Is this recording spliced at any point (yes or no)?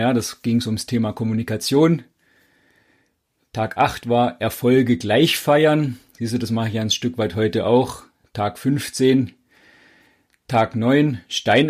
no